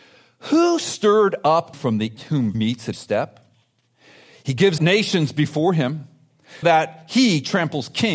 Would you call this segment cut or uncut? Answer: cut